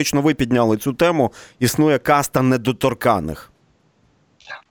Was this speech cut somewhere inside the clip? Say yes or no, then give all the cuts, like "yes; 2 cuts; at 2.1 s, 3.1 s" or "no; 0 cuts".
no; 0 cuts